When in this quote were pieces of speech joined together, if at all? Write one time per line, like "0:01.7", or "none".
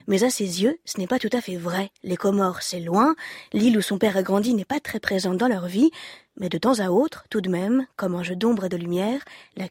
0:01.9